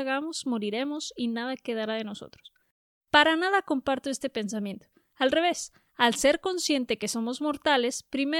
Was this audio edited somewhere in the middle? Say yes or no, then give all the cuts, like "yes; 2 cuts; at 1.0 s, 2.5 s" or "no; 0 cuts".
no; 0 cuts